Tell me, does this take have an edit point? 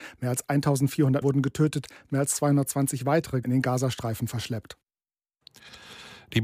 yes; 2 cuts; at 1.2 s, 3.4 s

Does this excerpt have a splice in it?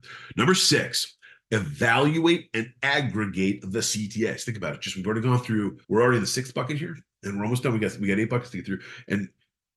yes; 1 cut; at 5.8 s

